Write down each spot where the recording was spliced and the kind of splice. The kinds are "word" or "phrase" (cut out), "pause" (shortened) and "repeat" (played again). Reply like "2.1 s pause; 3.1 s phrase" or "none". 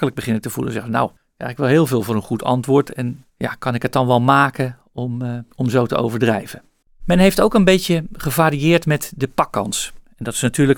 1.2 s pause; 3.3 s pause; 5.5 s pause; 6.8 s pause